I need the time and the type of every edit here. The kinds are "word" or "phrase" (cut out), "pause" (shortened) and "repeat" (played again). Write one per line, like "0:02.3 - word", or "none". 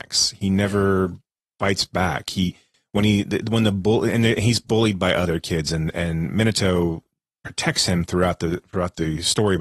none